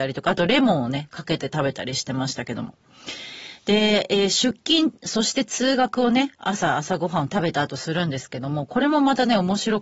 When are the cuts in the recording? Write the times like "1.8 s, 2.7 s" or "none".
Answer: none